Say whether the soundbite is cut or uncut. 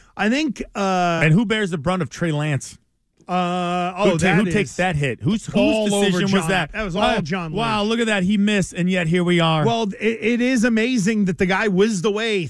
uncut